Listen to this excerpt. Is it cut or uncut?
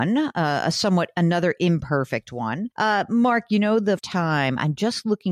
cut